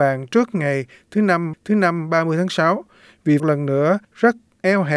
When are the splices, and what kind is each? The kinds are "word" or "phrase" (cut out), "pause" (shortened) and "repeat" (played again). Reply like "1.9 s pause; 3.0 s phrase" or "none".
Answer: 1.5 s repeat; 3.4 s phrase; 4.0 s pause